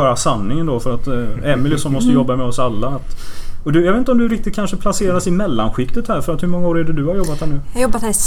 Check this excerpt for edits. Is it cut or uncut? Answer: uncut